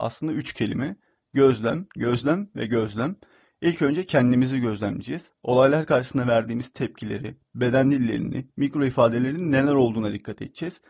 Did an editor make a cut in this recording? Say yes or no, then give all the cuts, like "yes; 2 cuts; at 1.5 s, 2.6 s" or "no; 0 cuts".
no; 0 cuts